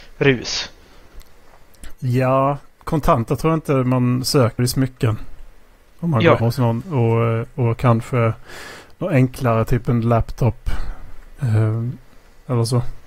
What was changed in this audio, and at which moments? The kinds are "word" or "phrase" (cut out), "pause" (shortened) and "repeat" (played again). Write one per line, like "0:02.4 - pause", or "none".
0:04.6 - phrase
0:06.4 - word